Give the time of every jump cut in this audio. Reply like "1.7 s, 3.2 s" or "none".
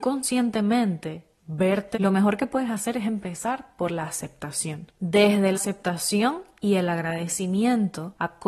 1.4 s, 1.9 s, 5.5 s